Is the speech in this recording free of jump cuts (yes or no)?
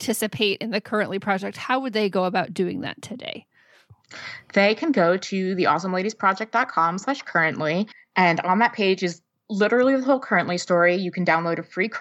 no